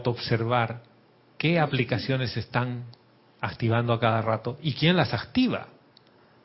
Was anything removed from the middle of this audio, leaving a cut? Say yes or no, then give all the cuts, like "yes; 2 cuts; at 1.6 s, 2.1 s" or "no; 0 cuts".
no; 0 cuts